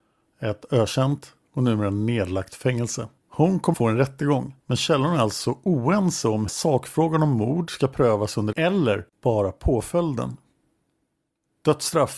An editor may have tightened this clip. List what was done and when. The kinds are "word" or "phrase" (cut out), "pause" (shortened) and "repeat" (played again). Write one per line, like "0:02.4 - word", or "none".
0:03.2 - pause
0:03.7 - word
0:04.6 - pause
0:06.5 - word
0:08.5 - word
0:09.1 - pause